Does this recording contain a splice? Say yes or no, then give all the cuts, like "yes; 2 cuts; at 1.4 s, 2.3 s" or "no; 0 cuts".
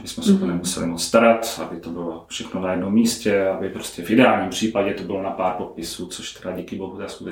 no; 0 cuts